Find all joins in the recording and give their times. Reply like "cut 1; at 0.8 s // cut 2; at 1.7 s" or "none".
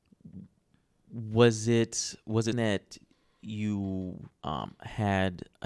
cut 1; at 2.5 s // cut 2; at 4.3 s